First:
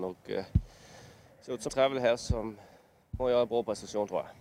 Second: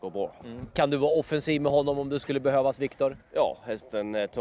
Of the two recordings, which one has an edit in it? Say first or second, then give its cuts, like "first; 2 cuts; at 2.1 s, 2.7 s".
first; 2 cuts; at 1.7 s, 3.2 s